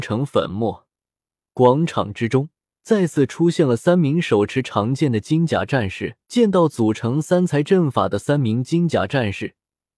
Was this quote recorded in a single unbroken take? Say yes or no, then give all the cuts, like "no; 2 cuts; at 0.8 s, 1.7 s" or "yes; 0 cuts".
no; 2 cuts; at 2.6 s, 6.2 s